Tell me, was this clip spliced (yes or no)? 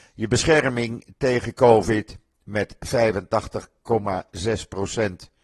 no